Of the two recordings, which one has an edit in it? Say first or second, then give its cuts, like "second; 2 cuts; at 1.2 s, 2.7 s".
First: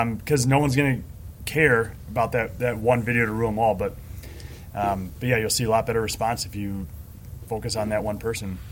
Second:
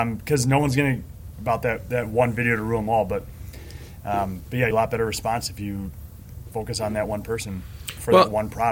second; 2 cuts; at 1.3 s, 4.7 s